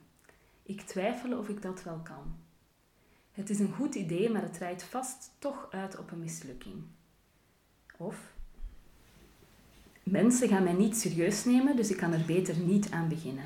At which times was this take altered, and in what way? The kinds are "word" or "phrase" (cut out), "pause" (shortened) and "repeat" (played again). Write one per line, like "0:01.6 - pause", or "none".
none